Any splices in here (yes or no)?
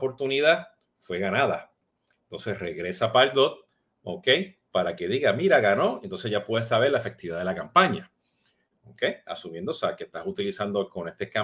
no